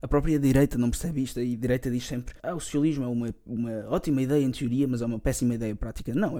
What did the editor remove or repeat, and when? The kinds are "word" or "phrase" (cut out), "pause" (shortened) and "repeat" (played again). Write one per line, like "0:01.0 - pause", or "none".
0:02.4 - pause